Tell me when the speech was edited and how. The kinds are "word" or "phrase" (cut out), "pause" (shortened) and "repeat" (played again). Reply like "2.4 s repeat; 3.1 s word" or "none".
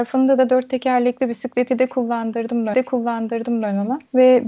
2.7 s repeat